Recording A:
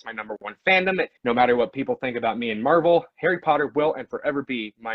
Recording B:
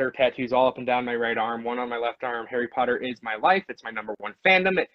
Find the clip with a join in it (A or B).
A